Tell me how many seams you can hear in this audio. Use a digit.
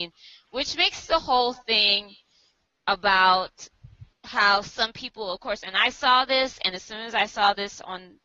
1